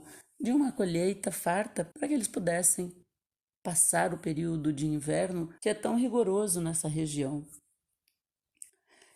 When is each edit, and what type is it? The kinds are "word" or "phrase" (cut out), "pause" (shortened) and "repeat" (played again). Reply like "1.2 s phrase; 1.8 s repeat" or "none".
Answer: 1.9 s pause; 5.6 s pause